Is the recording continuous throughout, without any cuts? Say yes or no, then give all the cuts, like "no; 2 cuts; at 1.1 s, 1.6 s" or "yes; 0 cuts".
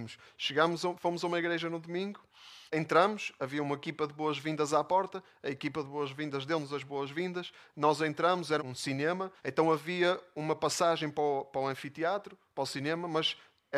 no; 3 cuts; at 2.7 s, 8.6 s, 9.4 s